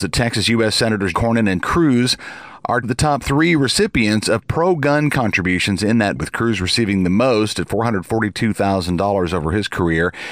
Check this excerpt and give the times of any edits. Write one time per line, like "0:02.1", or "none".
0:01.1
0:01.6
0:02.8
0:05.1
0:06.2